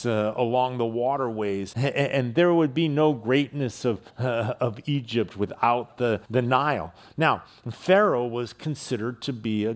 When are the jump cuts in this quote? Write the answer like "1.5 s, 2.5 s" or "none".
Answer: 1.7 s, 4.1 s, 6.2 s